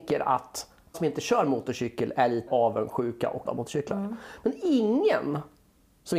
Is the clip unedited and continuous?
no; 3 cuts; at 0.9 s, 2.5 s, 3.4 s

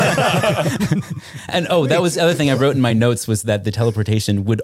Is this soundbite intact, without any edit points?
yes; 0 cuts

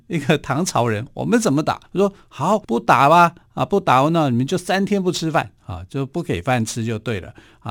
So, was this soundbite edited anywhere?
yes; 3 cuts; at 1.9 s, 2.6 s, 5.6 s

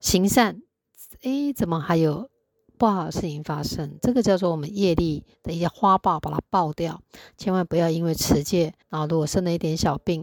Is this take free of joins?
no; 1 cut; at 8.8 s

